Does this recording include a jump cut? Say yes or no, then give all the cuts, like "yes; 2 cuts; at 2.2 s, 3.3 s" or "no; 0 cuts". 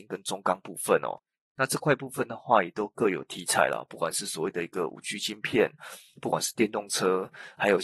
no; 0 cuts